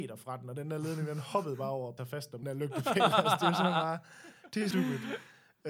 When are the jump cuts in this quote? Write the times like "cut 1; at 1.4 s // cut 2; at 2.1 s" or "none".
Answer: cut 1; at 2.0 s // cut 2; at 2.4 s // cut 3; at 4.7 s